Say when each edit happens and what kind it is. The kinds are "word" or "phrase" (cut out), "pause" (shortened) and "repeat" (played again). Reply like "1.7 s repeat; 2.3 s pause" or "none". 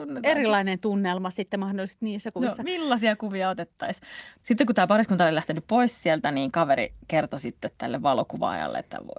none

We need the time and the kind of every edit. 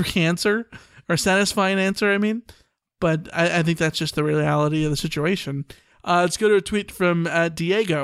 none

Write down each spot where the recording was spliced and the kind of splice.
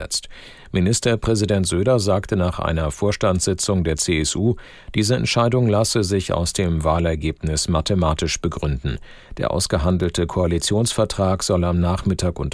none

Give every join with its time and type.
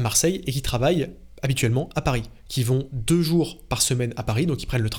none

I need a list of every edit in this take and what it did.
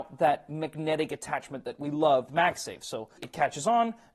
2.3 s word; 3.2 s word

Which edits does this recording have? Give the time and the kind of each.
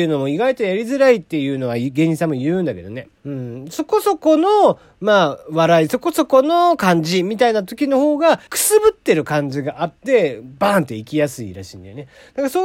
3.2 s pause; 8.5 s pause

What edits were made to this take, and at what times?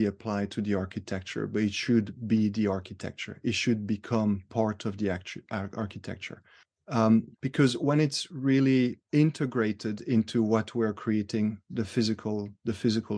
9.0 s pause

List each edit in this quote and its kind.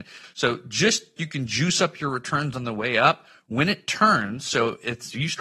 1.2 s word

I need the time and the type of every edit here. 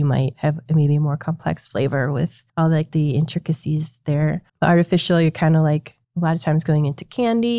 2.5 s pause; 4.5 s pause; 6.0 s pause

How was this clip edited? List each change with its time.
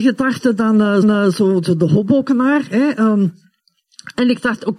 1.0 s repeat

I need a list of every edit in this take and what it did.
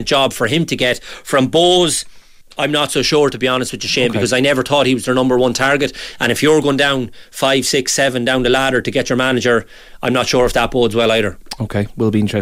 2.4 s pause

